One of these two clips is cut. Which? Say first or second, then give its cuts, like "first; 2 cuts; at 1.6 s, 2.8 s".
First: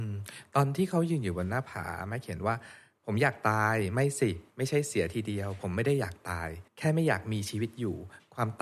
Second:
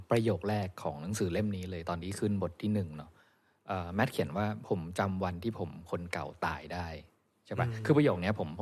first; 1 cut; at 6.7 s